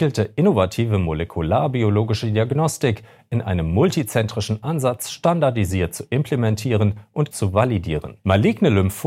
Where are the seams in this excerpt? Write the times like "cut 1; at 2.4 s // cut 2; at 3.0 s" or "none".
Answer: cut 1; at 7.3 s